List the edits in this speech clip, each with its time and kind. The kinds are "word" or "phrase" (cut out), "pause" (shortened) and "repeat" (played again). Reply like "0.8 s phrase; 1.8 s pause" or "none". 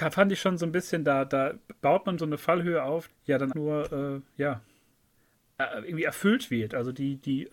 2.2 s word; 3.1 s word; 3.5 s word